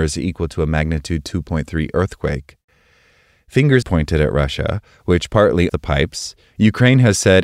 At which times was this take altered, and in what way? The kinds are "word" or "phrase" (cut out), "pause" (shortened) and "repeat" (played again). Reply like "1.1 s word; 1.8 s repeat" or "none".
3.8 s word; 5.7 s word

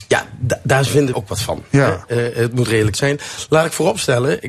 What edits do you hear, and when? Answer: 1.1 s word; 2.9 s phrase

